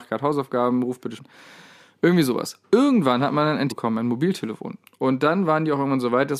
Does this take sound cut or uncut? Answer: cut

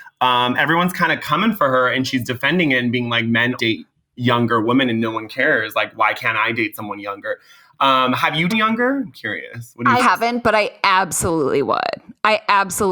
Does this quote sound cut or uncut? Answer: cut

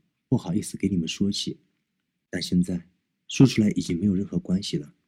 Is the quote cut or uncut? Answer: uncut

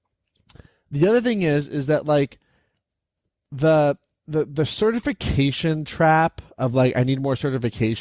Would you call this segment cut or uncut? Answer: uncut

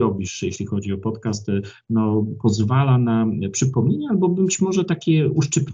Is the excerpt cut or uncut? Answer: uncut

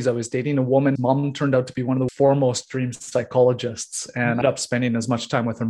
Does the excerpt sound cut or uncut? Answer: cut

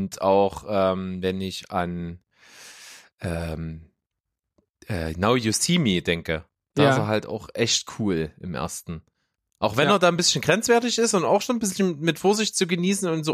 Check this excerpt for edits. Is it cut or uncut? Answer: uncut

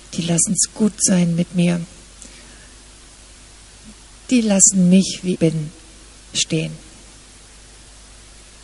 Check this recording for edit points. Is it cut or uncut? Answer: cut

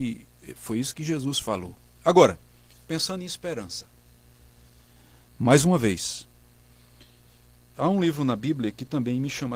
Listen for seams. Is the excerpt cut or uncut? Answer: uncut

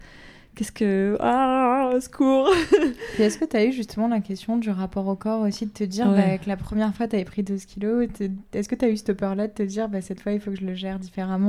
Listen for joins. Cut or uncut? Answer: uncut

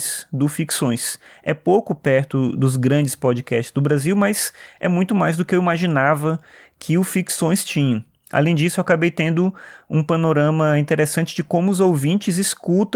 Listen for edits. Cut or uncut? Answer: uncut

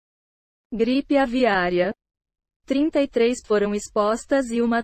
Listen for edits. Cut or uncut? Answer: cut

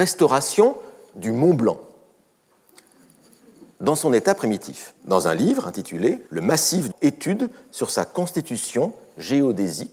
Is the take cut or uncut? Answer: cut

